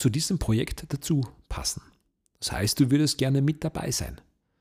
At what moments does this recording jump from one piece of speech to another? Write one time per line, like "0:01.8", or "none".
none